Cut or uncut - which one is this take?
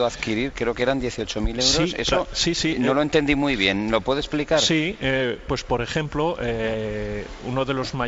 uncut